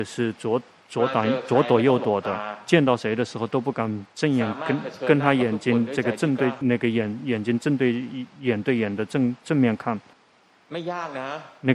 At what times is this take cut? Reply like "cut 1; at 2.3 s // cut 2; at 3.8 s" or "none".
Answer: cut 1; at 6.6 s // cut 2; at 10.1 s